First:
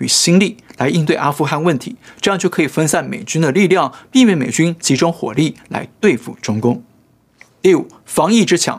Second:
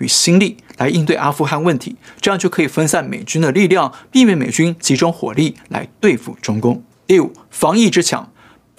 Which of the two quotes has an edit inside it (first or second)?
second